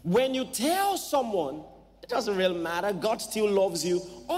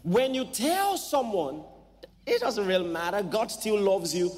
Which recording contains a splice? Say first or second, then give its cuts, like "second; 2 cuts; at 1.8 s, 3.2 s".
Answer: first; 1 cut; at 2.1 s